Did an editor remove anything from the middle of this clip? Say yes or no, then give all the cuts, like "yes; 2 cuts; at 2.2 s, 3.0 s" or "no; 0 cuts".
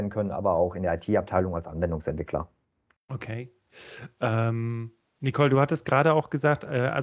no; 0 cuts